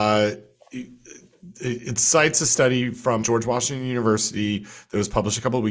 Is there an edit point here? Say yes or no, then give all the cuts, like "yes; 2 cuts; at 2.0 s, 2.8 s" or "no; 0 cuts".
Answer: yes; 1 cut; at 3.2 s